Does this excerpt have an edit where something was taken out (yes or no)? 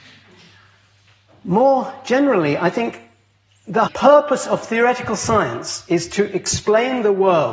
yes